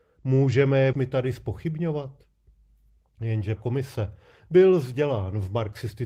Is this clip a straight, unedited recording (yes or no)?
no